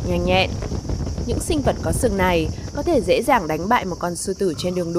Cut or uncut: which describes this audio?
uncut